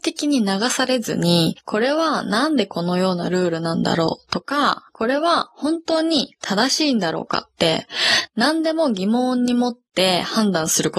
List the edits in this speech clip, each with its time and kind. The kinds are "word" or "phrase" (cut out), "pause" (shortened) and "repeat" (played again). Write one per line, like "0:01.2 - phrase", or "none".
0:04.9 - pause